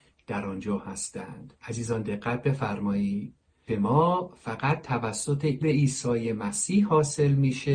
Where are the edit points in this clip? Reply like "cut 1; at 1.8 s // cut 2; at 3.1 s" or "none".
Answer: cut 1; at 1.6 s // cut 2; at 3.7 s // cut 3; at 5.6 s